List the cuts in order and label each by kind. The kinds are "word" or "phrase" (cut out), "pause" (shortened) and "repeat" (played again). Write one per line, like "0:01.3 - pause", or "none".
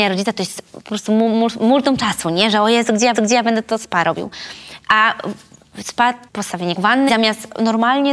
0:03.1 - repeat
0:06.3 - word
0:06.8 - phrase
0:07.1 - word

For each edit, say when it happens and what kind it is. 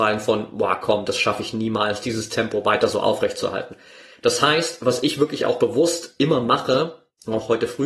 none

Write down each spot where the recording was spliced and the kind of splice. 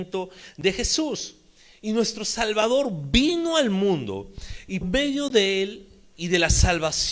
0:04.8 - word

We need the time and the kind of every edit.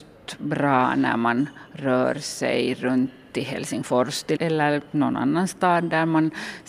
0:04.4 - word

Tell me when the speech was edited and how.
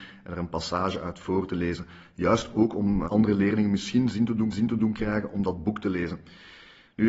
0:04.5 - repeat

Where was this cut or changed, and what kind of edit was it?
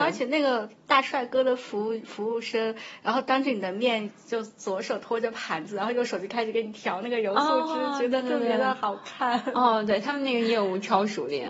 none

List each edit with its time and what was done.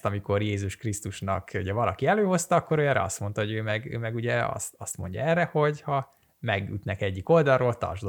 none

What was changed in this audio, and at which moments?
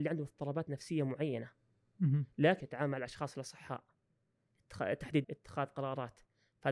0:02.6 - word
0:05.2 - word

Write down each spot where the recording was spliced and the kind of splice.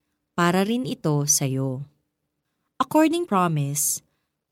0:03.3 - phrase

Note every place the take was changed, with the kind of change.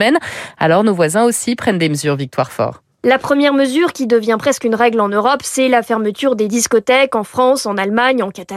none

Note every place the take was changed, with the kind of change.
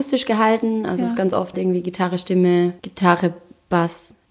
0:01.5 - word
0:02.8 - pause

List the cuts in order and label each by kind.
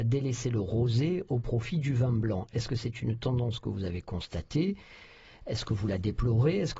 none

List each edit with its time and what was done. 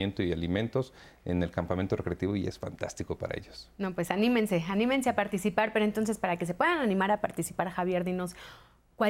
none

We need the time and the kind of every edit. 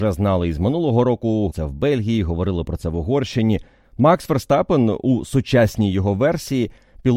0:01.5 - phrase

